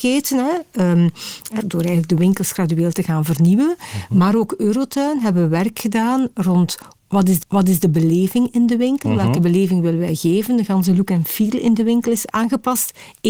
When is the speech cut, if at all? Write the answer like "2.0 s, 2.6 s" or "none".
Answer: 1.6 s, 7.4 s